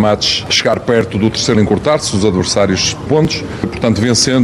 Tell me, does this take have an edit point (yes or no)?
yes